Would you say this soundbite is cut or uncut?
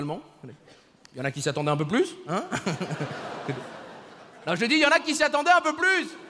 uncut